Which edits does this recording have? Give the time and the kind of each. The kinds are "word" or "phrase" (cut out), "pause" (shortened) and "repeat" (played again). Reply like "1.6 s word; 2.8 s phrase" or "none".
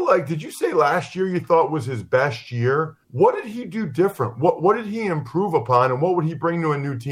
3.0 s pause